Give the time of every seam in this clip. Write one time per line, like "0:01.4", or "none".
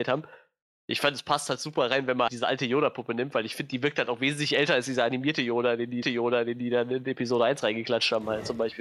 0:02.3
0:06.0